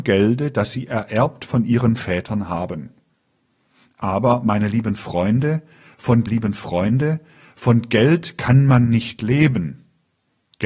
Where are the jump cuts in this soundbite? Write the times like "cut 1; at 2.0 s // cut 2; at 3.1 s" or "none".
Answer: cut 1; at 6.3 s